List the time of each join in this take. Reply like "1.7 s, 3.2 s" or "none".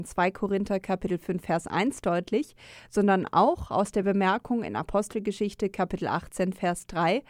none